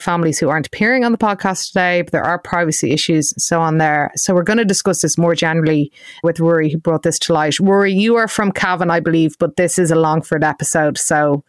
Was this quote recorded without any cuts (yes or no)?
no